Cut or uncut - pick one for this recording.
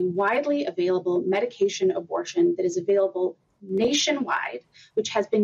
uncut